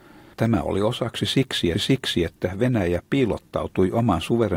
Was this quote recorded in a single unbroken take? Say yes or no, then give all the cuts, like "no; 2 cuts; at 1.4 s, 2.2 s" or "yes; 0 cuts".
no; 1 cut; at 1.7 s